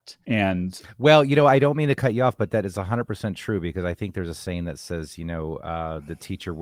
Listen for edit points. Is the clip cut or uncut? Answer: uncut